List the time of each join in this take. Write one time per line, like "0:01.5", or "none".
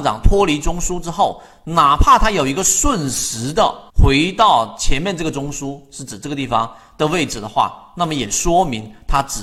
0:03.9